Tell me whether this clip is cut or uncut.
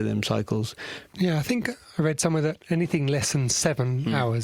uncut